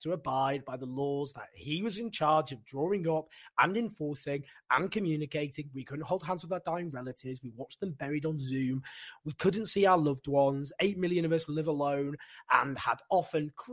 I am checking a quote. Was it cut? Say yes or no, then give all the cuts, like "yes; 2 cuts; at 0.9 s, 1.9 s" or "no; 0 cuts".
no; 0 cuts